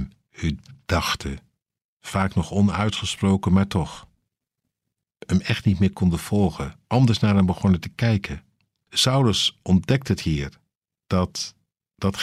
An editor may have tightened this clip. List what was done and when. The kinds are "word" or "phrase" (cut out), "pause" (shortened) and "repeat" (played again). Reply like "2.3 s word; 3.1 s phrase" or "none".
6.8 s pause

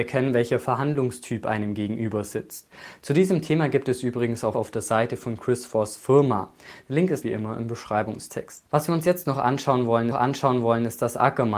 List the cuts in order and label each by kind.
4.5 s phrase; 7.2 s word; 10.1 s repeat

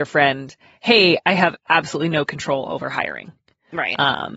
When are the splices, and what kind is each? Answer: none

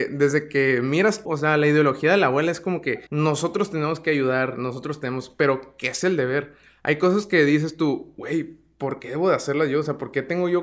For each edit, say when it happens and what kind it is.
1.3 s word; 3.1 s pause

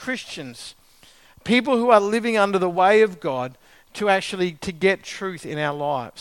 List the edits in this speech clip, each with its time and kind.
none

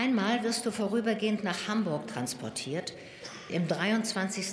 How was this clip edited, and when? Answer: 1.4 s word; 3.5 s word

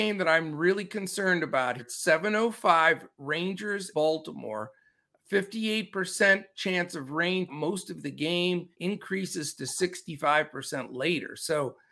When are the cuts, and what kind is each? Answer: 1.8 s word; 3.9 s word; 7.5 s word; 8.7 s pause

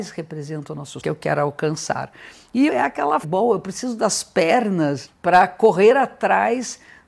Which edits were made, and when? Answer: 1.0 s phrase; 2.7 s phrase; 3.2 s word; 5.1 s word

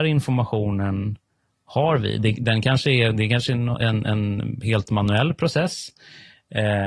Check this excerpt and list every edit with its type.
none

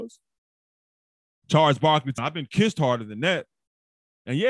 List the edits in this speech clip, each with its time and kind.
2.2 s word

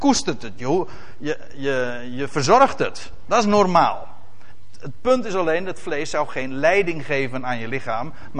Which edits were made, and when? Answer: none

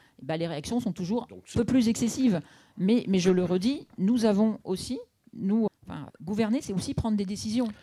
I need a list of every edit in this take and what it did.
1.5 s word; 5.7 s word; 6.1 s word

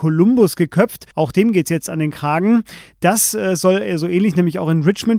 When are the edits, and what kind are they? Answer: 1.1 s pause

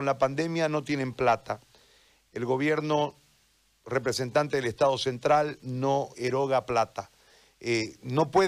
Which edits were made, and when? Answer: 6.1 s word

